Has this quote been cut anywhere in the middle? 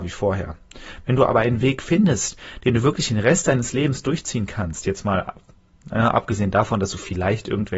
no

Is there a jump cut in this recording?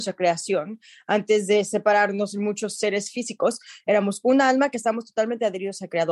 no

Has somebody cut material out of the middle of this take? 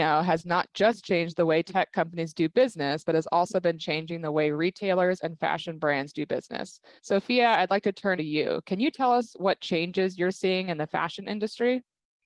yes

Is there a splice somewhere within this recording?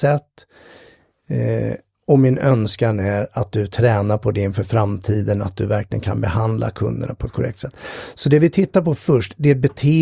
no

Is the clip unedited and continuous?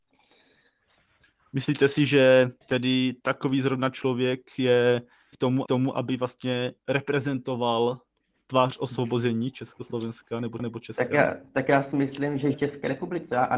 no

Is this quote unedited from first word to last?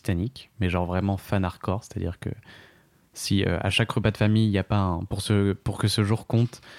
yes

